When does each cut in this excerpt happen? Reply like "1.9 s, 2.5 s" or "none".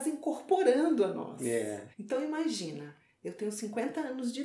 1.9 s